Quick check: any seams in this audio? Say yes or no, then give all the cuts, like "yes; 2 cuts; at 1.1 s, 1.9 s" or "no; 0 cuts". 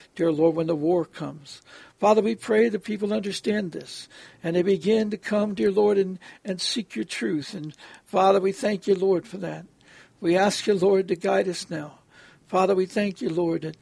no; 0 cuts